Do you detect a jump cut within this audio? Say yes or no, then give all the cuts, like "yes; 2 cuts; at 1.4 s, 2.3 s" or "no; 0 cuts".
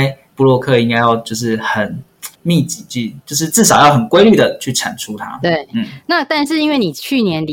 yes; 1 cut; at 2.3 s